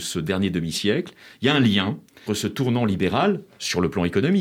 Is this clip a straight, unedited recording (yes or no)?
no